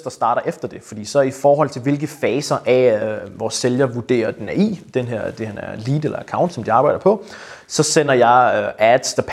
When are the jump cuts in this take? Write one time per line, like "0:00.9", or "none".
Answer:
none